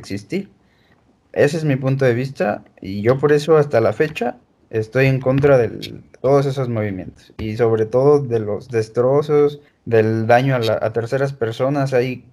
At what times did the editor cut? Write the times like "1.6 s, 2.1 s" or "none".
9.7 s